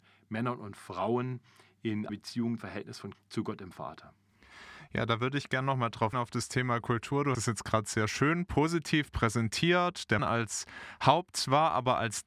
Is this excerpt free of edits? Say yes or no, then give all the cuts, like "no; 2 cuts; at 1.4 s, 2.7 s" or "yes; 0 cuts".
no; 6 cuts; at 2.1 s, 2.6 s, 3.1 s, 6.1 s, 7.3 s, 10.2 s